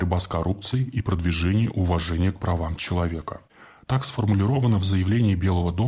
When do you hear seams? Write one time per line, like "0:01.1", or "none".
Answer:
none